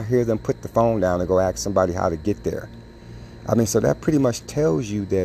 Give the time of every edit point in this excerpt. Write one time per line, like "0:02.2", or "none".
none